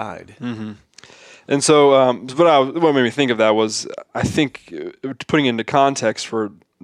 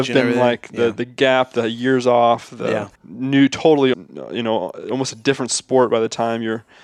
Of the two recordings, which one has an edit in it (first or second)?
second